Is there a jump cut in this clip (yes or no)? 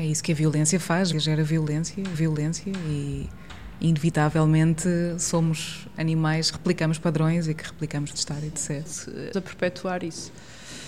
yes